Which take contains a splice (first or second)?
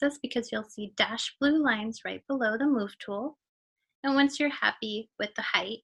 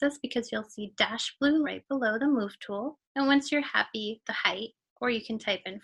second